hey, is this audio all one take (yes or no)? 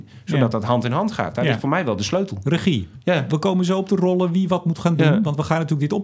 yes